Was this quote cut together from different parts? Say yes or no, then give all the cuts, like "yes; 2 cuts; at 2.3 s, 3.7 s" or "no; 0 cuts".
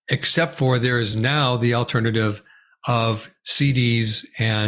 no; 0 cuts